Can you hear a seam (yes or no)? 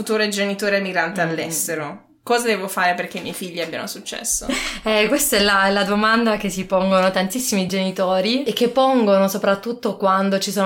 no